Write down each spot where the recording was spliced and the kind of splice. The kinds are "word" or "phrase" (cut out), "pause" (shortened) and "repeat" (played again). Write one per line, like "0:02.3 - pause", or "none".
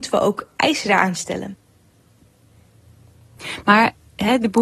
0:01.1 - word